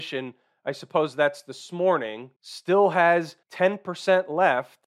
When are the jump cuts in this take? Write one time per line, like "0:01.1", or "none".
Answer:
0:02.4
0:03.4